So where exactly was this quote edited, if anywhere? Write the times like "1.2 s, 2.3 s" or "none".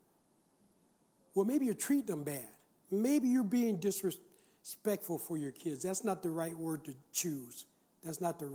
2.7 s